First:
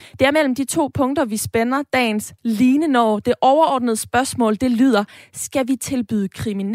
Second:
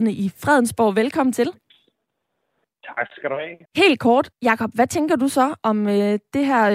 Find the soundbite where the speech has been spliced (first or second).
second